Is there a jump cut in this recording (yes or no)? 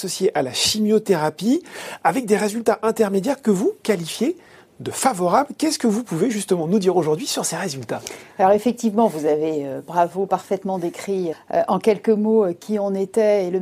yes